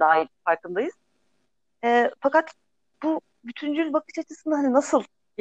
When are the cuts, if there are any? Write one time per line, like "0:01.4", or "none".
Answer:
none